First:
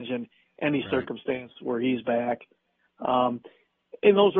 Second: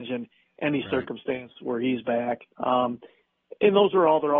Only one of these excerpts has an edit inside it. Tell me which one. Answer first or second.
second